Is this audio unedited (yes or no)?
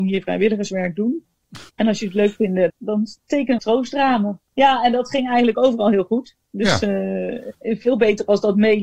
no